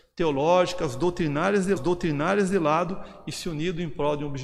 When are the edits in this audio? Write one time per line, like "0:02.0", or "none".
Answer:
0:01.8